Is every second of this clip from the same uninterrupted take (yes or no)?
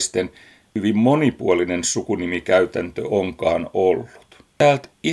yes